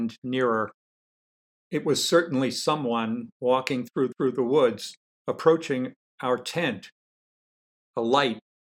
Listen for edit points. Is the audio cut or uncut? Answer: cut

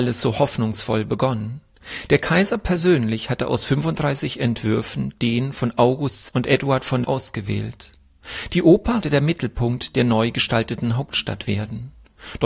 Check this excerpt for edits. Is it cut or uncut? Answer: cut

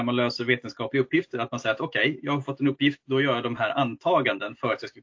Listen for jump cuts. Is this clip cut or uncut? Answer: uncut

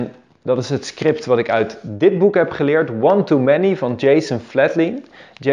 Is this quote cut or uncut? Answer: uncut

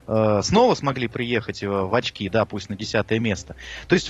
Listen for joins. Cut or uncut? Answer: uncut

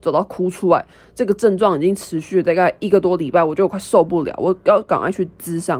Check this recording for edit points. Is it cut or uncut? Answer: uncut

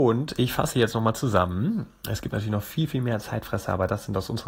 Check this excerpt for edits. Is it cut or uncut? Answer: uncut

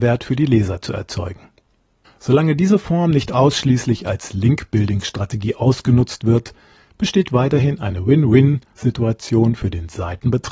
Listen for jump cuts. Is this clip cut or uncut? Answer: uncut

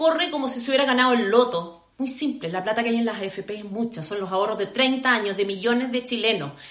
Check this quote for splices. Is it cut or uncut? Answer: cut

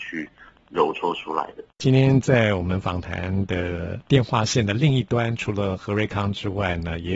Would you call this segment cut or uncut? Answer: cut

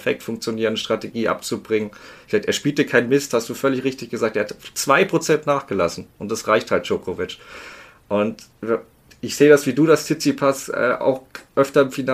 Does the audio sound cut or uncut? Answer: uncut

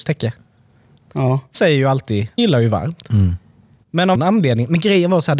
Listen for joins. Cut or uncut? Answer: cut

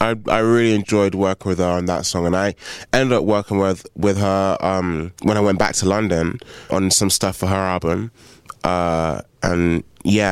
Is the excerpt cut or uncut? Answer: cut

